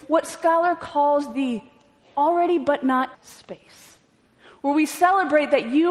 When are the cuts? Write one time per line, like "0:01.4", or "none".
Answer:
0:03.1